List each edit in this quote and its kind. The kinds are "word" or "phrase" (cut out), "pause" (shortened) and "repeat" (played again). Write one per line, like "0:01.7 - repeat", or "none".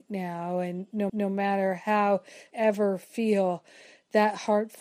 0:01.1 - repeat
0:02.5 - phrase